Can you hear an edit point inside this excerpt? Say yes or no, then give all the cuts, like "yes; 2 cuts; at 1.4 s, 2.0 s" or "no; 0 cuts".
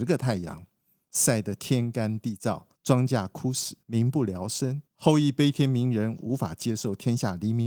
yes; 3 cuts; at 2.7 s, 3.8 s, 4.9 s